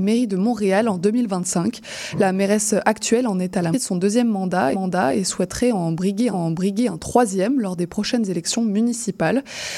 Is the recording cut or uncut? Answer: cut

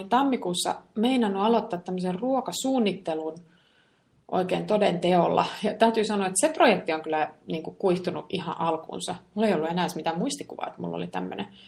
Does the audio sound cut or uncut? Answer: uncut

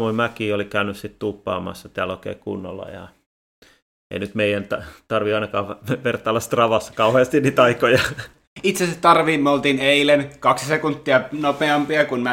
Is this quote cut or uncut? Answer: uncut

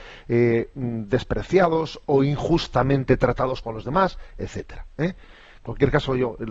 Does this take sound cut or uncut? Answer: cut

